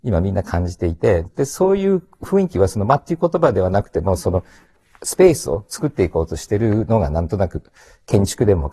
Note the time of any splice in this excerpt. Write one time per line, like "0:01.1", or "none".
0:01.3